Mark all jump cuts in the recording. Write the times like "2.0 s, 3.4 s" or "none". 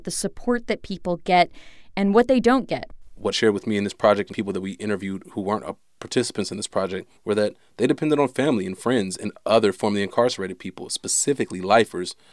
3.3 s, 4.3 s, 7.2 s